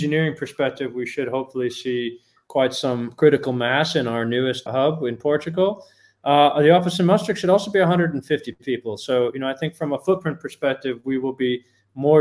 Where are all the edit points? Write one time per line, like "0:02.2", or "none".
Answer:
0:04.7